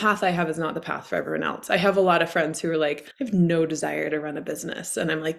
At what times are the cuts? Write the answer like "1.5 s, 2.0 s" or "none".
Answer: 3.1 s